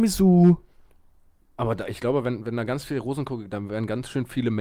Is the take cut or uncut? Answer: uncut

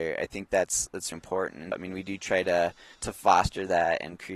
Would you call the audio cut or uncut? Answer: cut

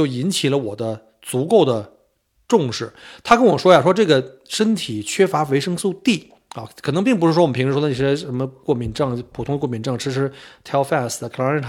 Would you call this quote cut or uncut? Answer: uncut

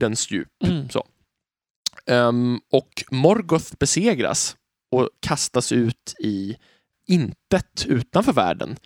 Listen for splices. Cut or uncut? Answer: cut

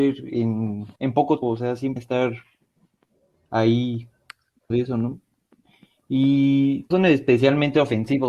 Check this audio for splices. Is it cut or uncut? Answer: cut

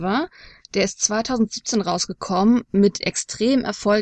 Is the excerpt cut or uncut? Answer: uncut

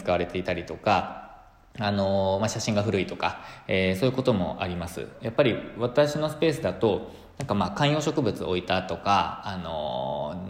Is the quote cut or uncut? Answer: uncut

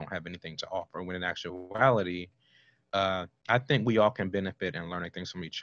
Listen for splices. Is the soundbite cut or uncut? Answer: uncut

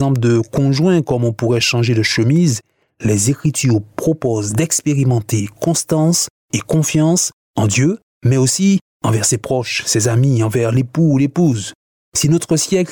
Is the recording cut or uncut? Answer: uncut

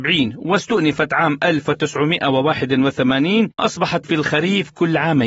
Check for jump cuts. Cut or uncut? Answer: cut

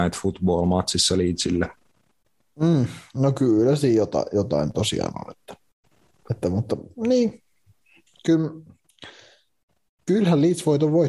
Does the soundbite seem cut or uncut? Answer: uncut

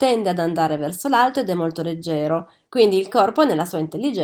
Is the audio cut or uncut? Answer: uncut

